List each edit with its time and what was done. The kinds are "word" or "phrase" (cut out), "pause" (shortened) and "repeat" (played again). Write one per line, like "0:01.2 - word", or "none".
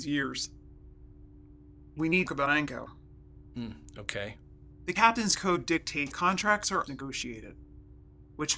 0:02.3 - phrase
0:06.1 - word
0:06.9 - phrase